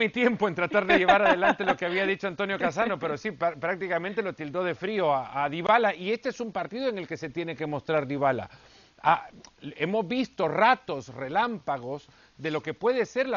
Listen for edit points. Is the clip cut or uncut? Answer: uncut